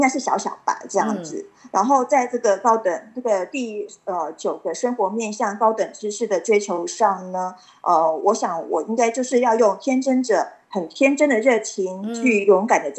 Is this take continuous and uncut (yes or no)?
yes